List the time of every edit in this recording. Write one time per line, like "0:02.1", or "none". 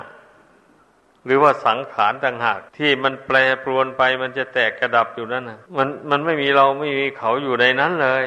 0:02.7
0:05.7